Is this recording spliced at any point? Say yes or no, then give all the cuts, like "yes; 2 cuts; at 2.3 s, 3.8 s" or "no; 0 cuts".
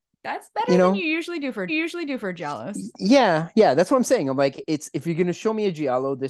yes; 2 cuts; at 1.7 s, 4.6 s